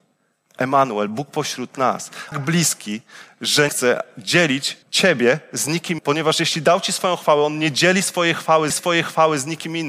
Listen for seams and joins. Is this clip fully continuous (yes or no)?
no